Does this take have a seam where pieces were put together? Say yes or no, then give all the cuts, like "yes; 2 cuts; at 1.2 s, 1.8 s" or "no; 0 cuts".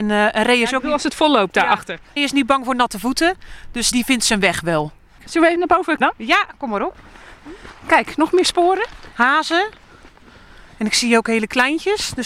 yes; 4 cuts; at 2.2 s, 3.9 s, 5.6 s, 6.0 s